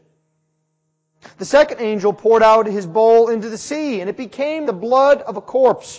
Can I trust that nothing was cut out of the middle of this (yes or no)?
no